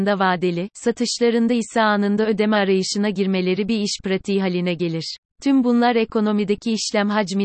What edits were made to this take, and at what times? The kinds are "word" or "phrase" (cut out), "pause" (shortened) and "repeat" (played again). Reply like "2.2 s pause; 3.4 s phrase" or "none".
5.3 s pause